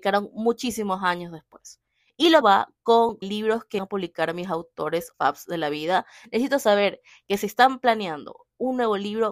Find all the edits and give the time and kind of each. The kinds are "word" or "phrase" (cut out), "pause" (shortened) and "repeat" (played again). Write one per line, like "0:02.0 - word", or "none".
0:02.4 - word
0:03.2 - word
0:03.8 - word
0:05.1 - word